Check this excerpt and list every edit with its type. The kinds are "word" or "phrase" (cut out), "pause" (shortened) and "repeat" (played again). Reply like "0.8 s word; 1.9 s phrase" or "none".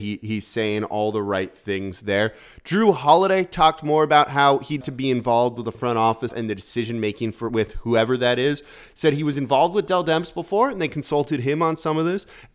4.8 s word; 6.3 s word